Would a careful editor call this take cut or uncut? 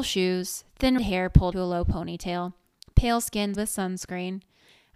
cut